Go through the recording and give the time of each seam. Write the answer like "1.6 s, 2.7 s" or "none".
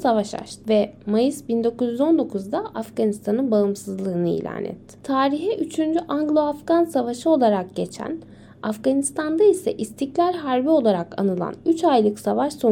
none